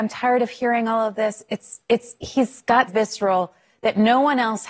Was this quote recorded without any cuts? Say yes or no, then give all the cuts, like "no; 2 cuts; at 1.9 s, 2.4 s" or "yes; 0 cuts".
no; 1 cut; at 2.9 s